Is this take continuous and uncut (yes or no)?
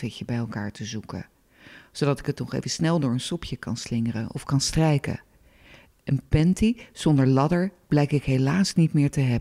yes